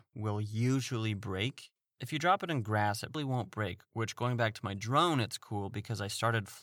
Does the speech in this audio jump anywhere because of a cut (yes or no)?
yes